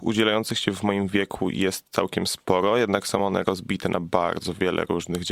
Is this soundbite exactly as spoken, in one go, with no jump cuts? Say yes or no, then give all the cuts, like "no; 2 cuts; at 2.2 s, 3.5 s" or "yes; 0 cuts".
yes; 0 cuts